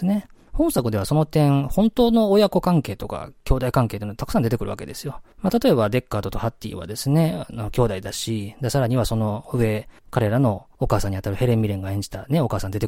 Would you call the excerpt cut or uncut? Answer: cut